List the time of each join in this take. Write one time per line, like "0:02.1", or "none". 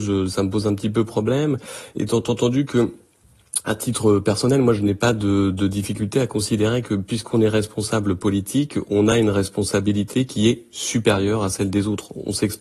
none